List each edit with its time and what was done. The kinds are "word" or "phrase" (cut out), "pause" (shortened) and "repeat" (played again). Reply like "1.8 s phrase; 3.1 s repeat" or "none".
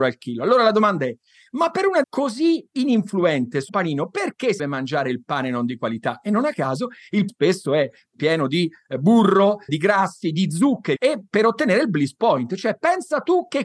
2.0 s word; 3.7 s word; 4.6 s word; 7.3 s word; 9.7 s word; 11.0 s word